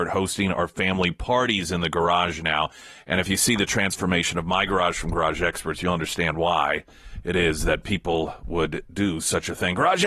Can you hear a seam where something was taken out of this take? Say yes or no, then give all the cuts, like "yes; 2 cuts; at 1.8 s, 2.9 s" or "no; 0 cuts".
no; 0 cuts